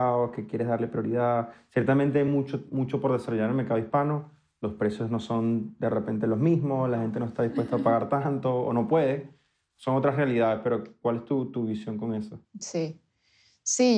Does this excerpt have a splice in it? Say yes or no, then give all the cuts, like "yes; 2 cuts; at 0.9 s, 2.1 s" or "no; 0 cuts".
no; 0 cuts